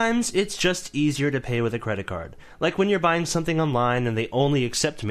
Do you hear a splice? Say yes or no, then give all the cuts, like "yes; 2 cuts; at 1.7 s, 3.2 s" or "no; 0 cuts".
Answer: no; 0 cuts